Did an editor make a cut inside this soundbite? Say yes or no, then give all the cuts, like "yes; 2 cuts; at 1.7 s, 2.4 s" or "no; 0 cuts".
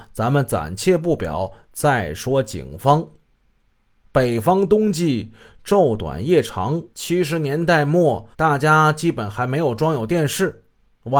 yes; 2 cuts; at 6.9 s, 8.3 s